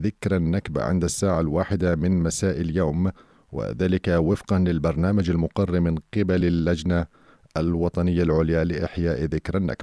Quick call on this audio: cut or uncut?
uncut